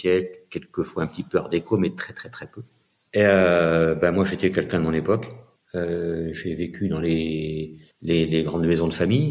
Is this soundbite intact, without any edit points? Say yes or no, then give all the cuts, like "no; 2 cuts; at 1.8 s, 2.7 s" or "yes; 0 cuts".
yes; 0 cuts